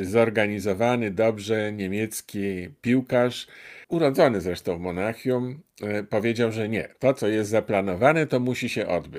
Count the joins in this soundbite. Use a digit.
1